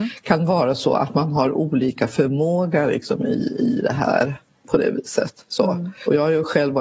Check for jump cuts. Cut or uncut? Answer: uncut